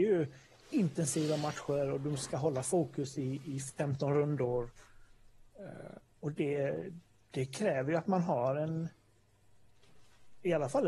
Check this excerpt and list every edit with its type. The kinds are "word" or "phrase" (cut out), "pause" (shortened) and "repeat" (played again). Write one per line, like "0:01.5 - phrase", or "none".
none